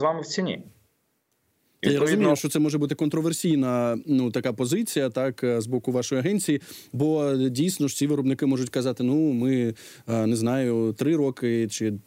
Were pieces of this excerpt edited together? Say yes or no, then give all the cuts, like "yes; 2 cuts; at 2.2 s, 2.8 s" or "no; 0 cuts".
no; 0 cuts